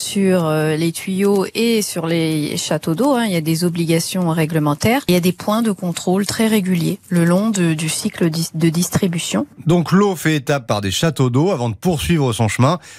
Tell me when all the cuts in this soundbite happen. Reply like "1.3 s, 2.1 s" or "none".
none